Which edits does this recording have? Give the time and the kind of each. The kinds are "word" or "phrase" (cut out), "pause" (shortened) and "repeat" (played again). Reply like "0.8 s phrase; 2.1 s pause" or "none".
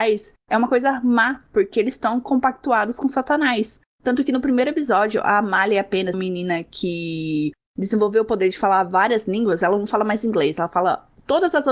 6.1 s phrase